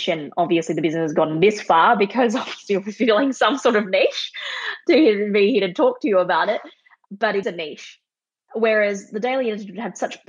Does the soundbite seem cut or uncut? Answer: cut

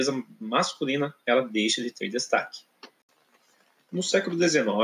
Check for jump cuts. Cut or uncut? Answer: uncut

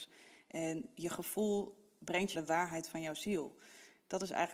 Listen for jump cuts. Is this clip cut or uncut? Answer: cut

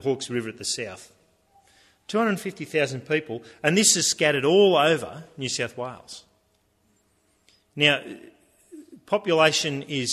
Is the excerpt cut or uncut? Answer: uncut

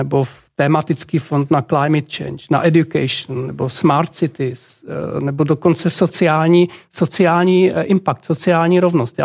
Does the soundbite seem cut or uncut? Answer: uncut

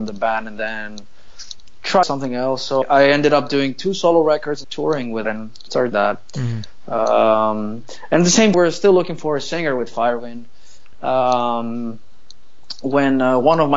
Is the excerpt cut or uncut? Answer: cut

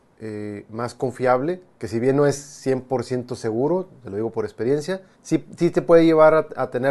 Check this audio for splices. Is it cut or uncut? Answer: cut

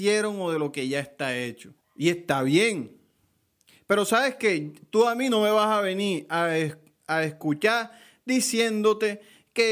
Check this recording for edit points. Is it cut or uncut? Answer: cut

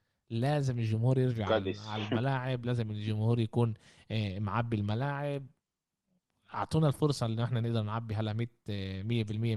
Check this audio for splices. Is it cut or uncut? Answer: uncut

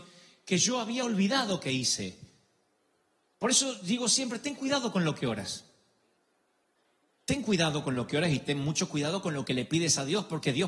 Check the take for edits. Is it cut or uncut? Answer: uncut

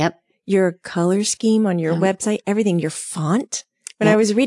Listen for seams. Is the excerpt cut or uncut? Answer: uncut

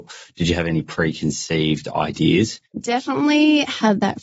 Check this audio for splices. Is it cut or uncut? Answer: cut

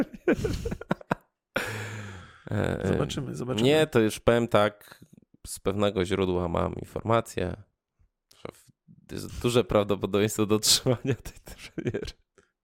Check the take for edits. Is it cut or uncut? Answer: uncut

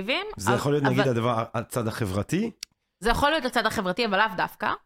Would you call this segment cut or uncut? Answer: uncut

